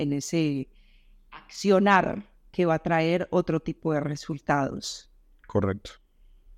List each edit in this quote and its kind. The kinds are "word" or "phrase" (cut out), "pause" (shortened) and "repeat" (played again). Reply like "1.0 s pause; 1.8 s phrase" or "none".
none

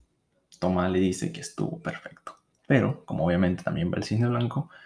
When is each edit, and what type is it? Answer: 2.5 s pause

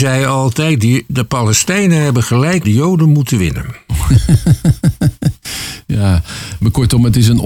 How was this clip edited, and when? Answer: 2.6 s word

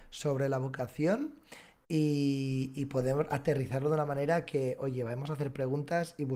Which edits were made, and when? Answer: none

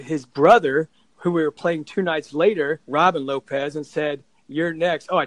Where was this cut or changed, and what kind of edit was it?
2.8 s pause

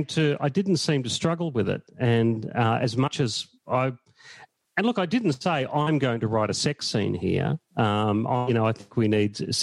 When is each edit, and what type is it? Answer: 3.6 s pause; 7.7 s pause

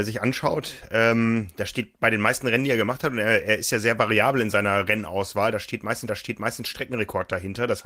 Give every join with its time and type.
6.1 s repeat

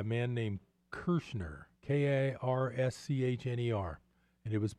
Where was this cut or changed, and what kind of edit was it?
1.8 s pause

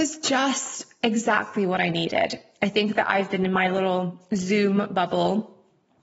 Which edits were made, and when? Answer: none

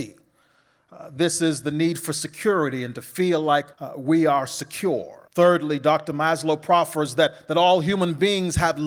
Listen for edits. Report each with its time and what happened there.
3.7 s pause; 5.3 s pause

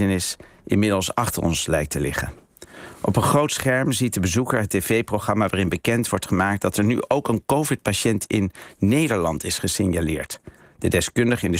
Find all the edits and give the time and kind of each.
none

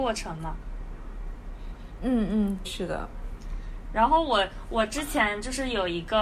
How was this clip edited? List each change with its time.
2.6 s word

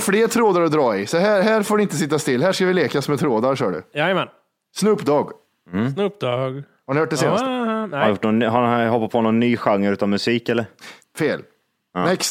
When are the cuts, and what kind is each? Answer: none

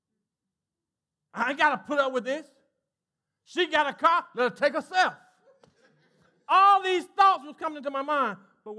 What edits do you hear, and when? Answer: none

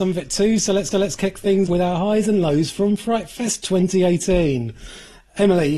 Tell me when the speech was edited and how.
0.9 s repeat; 1.7 s word

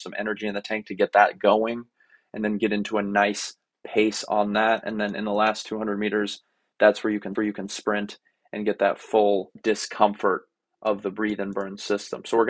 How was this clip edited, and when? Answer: 7.3 s repeat

